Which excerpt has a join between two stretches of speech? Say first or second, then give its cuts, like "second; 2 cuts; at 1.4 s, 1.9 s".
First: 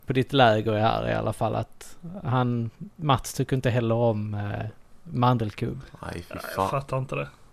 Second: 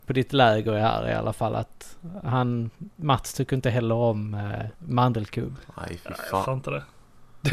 second; 2 cuts; at 4.7 s, 6.5 s